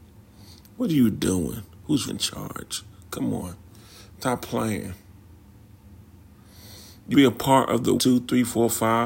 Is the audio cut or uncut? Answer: cut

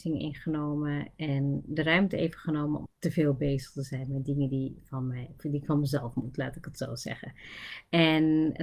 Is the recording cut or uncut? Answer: cut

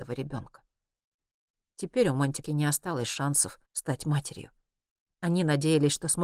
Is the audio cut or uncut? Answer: cut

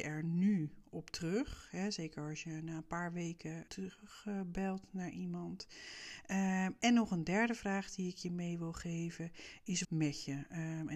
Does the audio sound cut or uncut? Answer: cut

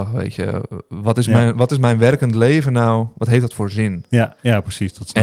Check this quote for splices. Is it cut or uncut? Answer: uncut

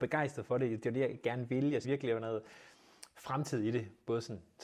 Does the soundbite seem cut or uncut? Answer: cut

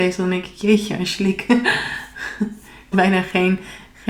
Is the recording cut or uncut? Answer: cut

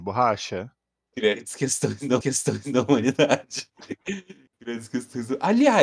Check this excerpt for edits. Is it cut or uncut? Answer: cut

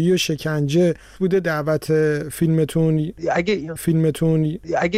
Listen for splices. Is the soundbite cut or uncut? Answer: cut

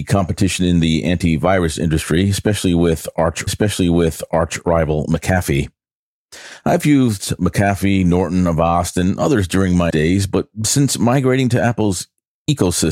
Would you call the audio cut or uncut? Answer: cut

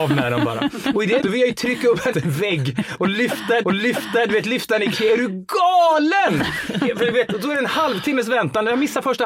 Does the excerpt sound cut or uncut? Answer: cut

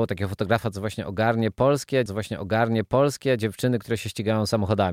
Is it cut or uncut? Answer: cut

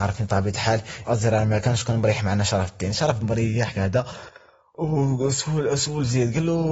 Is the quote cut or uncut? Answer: cut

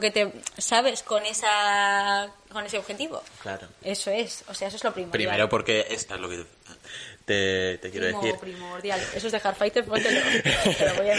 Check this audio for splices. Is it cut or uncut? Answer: cut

